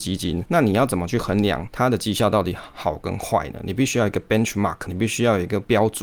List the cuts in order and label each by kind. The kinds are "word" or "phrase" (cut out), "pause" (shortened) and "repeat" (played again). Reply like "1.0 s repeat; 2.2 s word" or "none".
4.9 s word

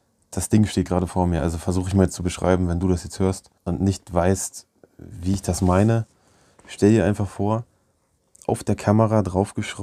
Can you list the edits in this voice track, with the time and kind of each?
3.6 s pause

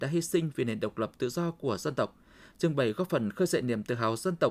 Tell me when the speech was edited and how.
none

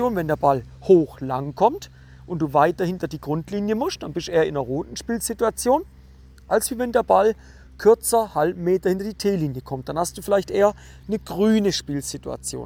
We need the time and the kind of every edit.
none

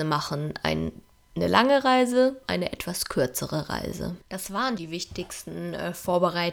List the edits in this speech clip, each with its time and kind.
1.1 s pause; 2.4 s word; 4.2 s pause; 4.8 s word

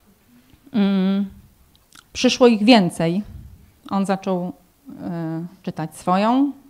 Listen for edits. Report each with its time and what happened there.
none

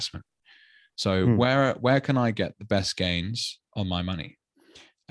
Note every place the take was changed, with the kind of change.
none

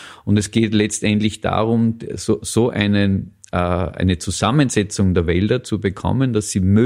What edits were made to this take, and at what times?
none

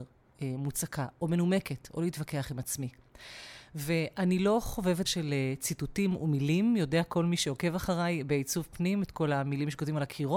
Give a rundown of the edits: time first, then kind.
5.0 s word

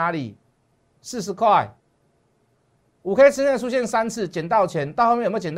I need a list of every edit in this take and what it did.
none

